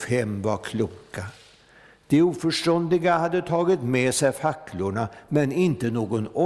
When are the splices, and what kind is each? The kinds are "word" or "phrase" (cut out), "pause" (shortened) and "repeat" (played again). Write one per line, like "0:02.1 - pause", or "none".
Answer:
none